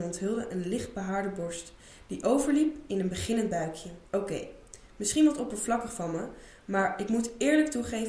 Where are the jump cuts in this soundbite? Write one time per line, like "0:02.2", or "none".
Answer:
0:04.1